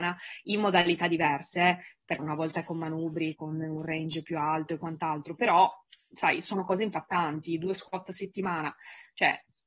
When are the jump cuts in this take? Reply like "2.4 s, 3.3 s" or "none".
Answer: 2.2 s